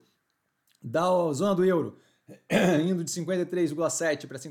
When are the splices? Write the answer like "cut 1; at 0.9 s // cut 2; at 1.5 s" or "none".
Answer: none